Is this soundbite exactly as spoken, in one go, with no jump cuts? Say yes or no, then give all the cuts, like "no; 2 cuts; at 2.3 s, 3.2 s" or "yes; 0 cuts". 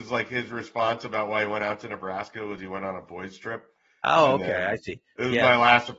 yes; 0 cuts